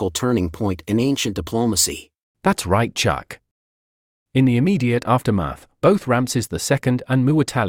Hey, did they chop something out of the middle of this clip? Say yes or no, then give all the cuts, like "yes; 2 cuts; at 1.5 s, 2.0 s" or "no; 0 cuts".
no; 0 cuts